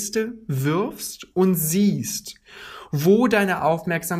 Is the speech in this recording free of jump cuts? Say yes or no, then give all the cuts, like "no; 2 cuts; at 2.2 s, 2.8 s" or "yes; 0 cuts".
yes; 0 cuts